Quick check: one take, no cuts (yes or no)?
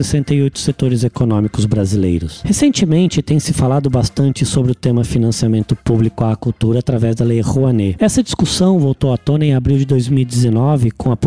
yes